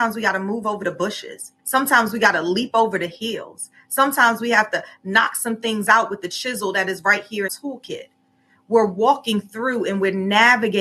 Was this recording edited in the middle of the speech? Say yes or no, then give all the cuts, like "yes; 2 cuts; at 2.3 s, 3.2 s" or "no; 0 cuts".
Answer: yes; 2 cuts; at 1.6 s, 7.5 s